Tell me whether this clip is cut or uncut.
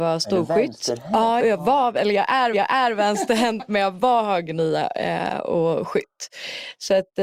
cut